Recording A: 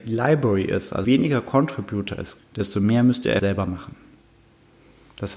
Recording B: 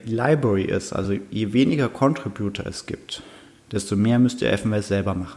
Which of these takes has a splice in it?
A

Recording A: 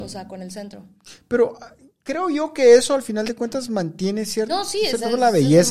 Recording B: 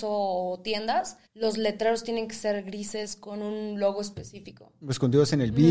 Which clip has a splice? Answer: B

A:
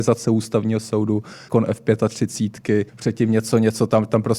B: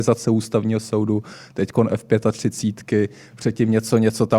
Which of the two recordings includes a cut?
A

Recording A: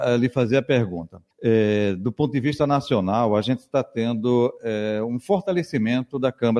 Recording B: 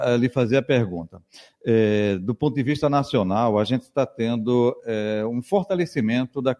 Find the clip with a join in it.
A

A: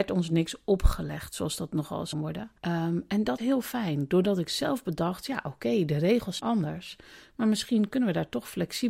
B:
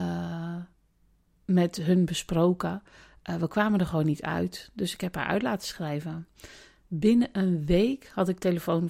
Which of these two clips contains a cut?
A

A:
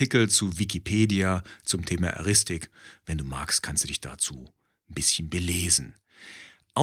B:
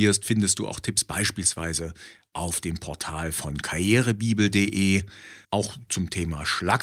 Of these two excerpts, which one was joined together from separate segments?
B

